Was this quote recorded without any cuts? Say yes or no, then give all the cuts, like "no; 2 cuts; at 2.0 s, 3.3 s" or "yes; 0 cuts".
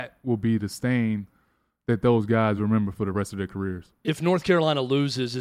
yes; 0 cuts